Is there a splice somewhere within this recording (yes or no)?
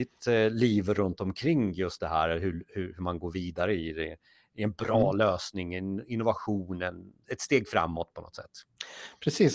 no